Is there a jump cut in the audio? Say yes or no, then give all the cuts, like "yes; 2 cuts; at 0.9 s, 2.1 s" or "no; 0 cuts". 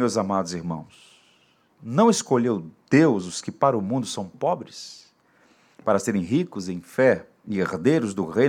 no; 0 cuts